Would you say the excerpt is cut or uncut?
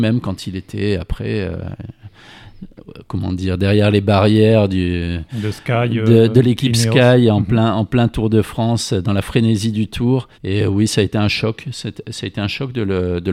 cut